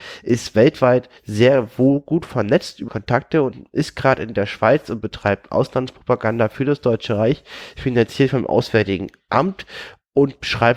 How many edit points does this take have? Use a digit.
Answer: 2